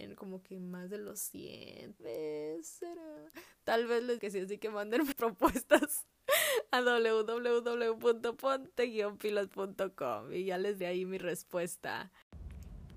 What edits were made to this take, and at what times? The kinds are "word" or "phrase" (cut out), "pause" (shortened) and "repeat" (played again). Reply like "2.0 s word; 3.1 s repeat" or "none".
2.0 s word; 4.2 s word; 5.1 s word; 10.8 s word